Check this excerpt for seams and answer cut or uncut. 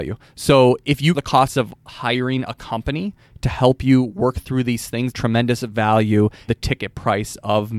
cut